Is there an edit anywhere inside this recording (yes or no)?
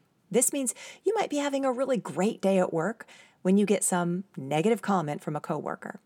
no